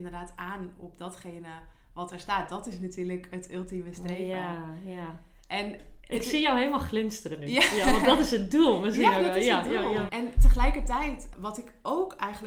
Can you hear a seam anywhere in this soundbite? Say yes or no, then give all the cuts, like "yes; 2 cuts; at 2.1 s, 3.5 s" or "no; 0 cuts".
yes; 2 cuts; at 10.1 s, 11.3 s